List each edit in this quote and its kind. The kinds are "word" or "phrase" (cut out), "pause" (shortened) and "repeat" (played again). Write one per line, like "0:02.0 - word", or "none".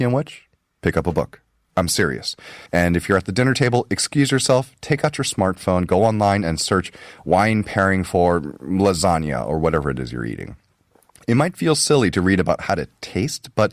0:01.6 - pause
0:02.7 - pause